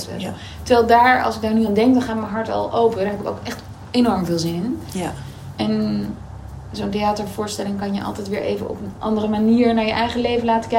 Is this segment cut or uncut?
uncut